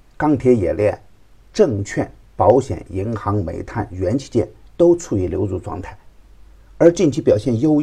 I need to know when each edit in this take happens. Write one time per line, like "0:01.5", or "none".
none